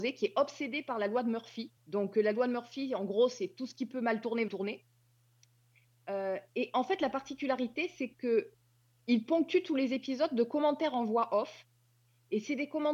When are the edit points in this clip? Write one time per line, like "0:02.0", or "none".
0:01.8
0:04.5